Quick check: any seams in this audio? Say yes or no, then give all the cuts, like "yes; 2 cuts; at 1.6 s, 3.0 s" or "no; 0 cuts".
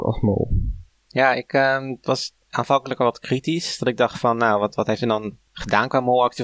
yes; 1 cut; at 2.4 s